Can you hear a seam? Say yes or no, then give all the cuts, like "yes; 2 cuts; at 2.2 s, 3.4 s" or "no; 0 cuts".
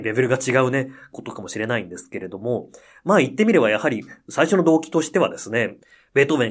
no; 0 cuts